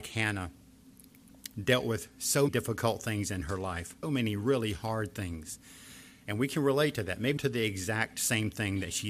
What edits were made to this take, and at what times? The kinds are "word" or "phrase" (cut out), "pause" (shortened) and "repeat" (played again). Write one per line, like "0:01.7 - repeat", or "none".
0:01.5 - word
0:02.5 - word
0:04.0 - word
0:07.4 - word